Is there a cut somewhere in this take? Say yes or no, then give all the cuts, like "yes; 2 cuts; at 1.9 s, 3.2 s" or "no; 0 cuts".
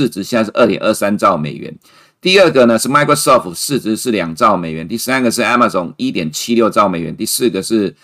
no; 0 cuts